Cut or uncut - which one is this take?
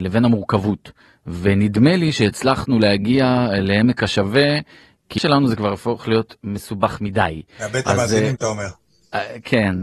cut